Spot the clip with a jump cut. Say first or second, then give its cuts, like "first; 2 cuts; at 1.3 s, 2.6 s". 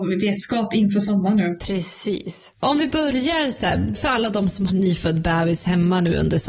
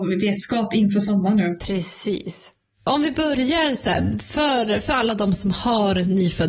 first; 3 cuts; at 2.5 s, 3.9 s, 4.7 s